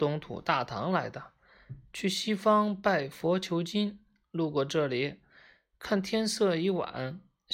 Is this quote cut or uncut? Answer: uncut